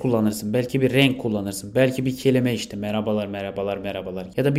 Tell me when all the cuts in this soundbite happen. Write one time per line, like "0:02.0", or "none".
none